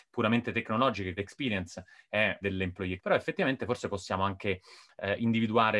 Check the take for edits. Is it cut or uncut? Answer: cut